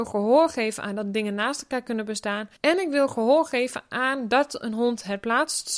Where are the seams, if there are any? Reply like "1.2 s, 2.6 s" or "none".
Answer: 2.6 s